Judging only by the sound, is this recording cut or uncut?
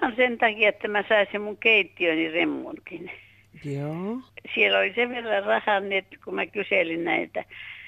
uncut